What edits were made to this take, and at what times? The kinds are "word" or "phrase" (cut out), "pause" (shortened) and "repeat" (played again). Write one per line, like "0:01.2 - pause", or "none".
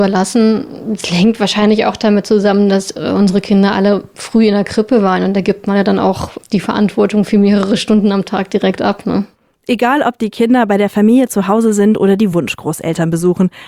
none